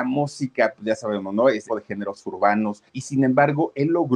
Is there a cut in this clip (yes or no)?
yes